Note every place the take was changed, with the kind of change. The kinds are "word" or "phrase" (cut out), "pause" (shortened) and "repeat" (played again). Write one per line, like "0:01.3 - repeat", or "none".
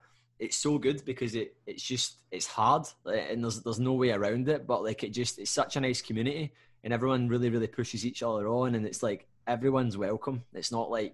0:02.3 - pause